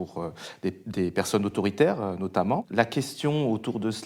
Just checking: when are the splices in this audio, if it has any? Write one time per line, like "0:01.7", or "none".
none